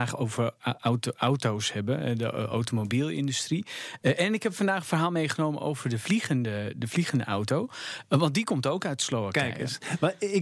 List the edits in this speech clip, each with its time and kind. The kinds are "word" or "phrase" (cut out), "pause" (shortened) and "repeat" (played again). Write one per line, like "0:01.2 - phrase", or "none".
none

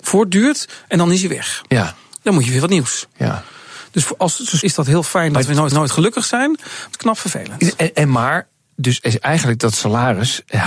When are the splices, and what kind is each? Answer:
0:04.6 - word
0:05.7 - repeat
0:06.9 - phrase

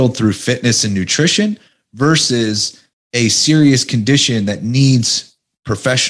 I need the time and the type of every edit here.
0:02.9 - pause

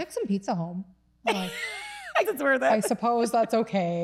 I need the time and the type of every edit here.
0:02.2 - word

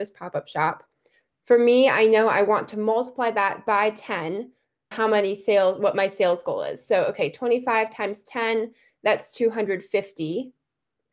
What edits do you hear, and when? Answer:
0:04.9 - phrase

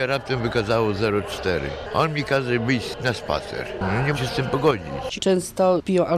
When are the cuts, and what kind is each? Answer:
0:04.1 - word
0:05.2 - phrase

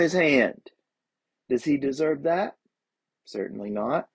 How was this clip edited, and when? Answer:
none

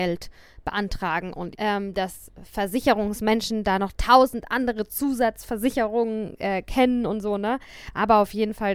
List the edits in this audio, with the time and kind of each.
0:01.5 - phrase

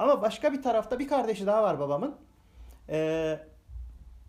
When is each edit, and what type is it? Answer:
none

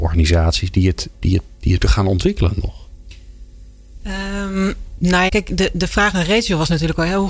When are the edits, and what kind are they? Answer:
0:01.1 - word
0:01.8 - word
0:05.3 - word

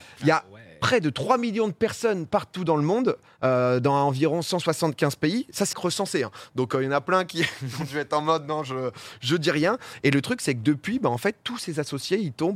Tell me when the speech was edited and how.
0:05.7 - phrase

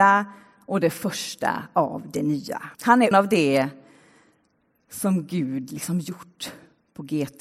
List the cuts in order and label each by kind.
0:02.7 - pause
0:03.1 - word

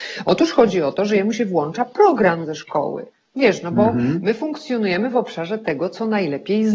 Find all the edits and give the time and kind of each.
0:03.1 - pause

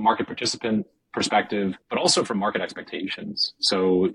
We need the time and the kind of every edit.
0:01.8 - pause

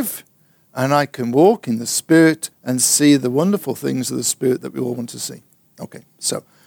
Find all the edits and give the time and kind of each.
0:02.5 - pause

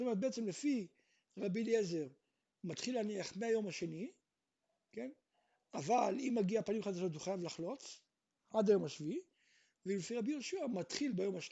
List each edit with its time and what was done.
none

